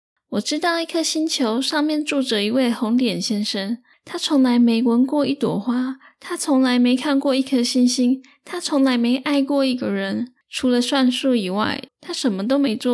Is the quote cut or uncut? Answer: cut